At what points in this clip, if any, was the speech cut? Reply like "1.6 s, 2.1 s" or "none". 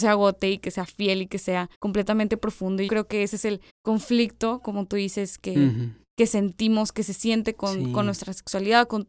1.7 s, 2.9 s, 3.7 s

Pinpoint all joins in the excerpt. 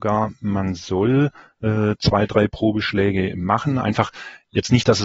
none

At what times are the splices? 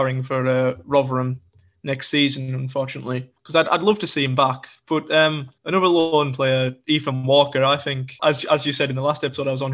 3.4 s, 5.6 s, 8.2 s

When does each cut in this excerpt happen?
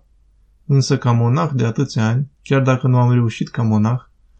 2.3 s

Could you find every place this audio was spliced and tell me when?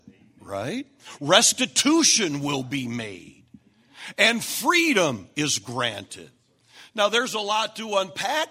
none

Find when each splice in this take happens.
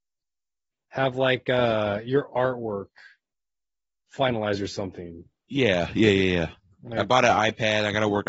none

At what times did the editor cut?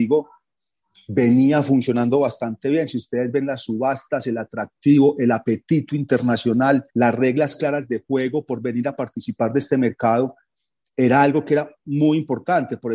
6.9 s

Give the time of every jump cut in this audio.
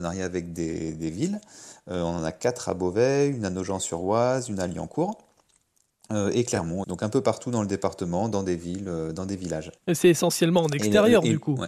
6.8 s, 9.8 s

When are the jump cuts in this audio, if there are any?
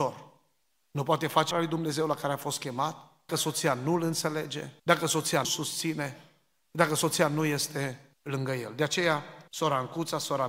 1.5 s, 3.3 s, 4.8 s, 5.4 s, 8.1 s, 9.5 s

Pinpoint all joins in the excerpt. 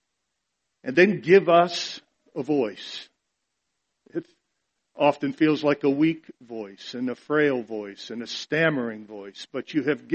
none

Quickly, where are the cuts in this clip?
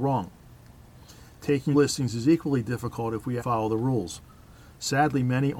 1.7 s, 3.4 s

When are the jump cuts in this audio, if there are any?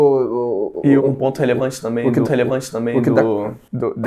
1.0 s, 2.2 s

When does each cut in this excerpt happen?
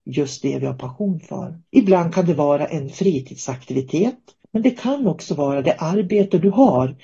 1.7 s, 4.4 s

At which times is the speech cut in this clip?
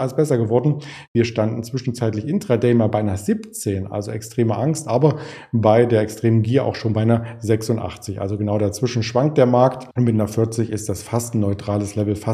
9.9 s

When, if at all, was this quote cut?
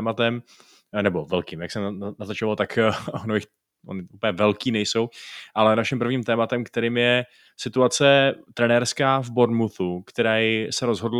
none

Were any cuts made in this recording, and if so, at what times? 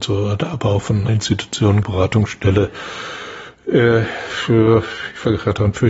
1.1 s, 1.8 s

